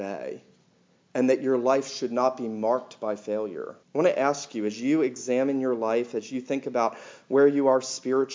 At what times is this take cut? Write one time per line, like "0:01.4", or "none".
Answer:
0:03.8